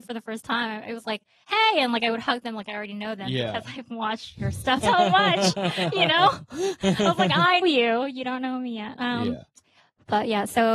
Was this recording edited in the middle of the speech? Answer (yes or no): yes